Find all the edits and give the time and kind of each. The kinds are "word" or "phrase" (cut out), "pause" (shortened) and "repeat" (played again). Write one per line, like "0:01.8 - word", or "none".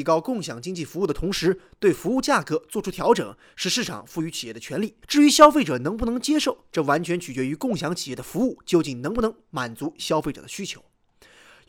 0:05.0 - pause